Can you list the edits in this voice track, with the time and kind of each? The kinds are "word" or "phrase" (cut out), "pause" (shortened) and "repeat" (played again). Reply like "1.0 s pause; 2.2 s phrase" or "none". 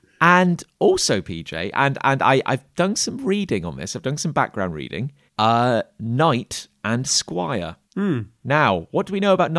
5.3 s pause; 7.8 s pause

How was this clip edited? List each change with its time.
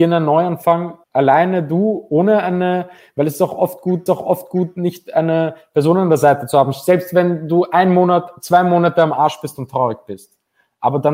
1.0 s pause; 4.1 s repeat

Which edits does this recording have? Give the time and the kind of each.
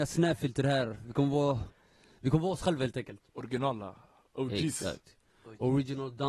none

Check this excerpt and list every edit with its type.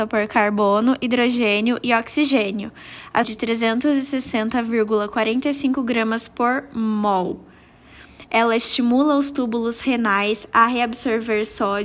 3.2 s phrase

